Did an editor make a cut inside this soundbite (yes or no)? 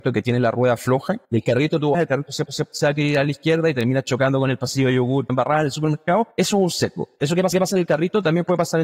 yes